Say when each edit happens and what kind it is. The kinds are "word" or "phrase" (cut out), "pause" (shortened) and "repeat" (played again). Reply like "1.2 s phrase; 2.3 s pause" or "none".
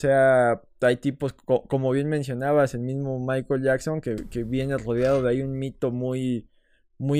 none

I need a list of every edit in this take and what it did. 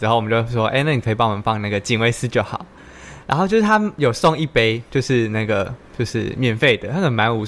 none

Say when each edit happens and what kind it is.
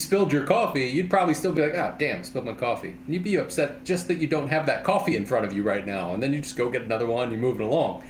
none

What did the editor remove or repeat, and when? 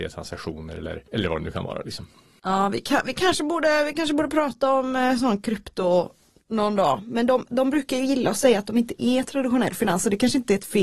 1.1 s pause

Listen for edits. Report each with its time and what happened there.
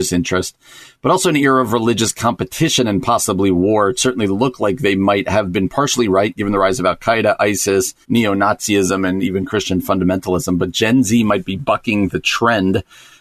8.0 s pause

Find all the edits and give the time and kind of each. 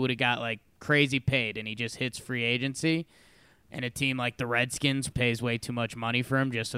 5.1 s word

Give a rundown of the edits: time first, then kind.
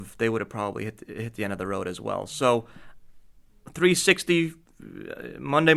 none

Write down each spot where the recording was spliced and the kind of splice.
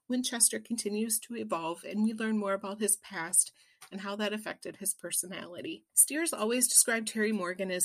5.9 s pause

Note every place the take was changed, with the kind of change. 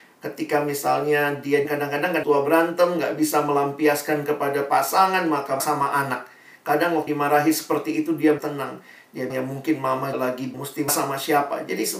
1.6 s word; 2.2 s word; 5.6 s word; 7.1 s word; 8.4 s word; 9.3 s word; 10.1 s word; 10.5 s word; 10.9 s word

